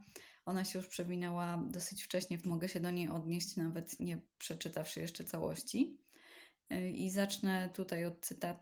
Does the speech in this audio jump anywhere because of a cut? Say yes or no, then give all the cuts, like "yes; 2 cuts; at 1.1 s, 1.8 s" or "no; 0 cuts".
yes; 2 cuts; at 2.4 s, 4.0 s